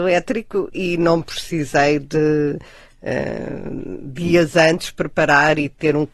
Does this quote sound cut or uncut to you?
uncut